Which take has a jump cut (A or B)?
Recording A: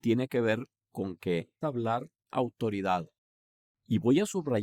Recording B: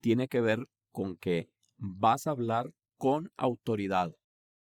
A